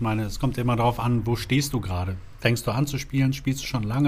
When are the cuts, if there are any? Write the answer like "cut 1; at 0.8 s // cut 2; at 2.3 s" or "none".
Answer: none